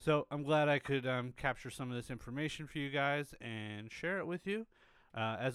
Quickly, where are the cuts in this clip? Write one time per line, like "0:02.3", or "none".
none